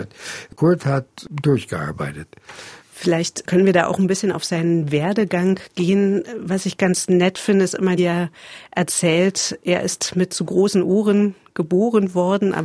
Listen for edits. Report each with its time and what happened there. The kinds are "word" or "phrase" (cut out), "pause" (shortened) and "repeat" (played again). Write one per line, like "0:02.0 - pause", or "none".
0:02.8 - pause
0:08.0 - phrase